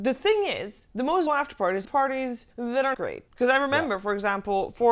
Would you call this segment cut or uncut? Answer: cut